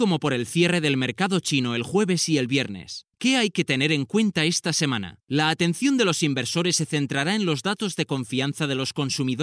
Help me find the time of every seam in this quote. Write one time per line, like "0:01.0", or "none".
0:03.1
0:05.2